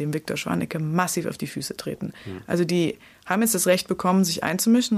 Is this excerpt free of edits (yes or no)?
yes